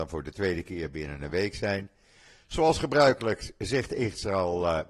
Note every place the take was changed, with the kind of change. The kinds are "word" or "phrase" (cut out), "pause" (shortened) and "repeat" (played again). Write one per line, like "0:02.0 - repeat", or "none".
none